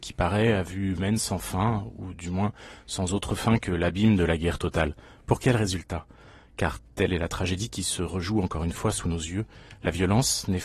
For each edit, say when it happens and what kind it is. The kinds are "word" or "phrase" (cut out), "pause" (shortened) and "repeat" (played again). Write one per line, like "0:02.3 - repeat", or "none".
none